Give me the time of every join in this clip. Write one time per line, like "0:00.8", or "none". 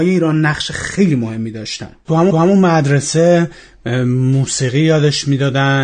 0:02.3